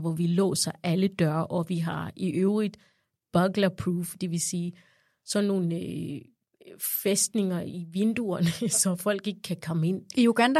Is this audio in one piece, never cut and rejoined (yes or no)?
yes